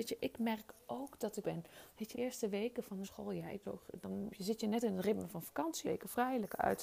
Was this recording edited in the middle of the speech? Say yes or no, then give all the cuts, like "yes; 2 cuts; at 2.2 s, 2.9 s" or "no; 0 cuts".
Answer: yes; 6 cuts; at 1.4 s, 2.1 s, 3.0 s, 3.6 s, 4.3 s, 5.8 s